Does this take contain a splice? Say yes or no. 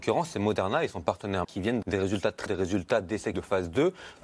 yes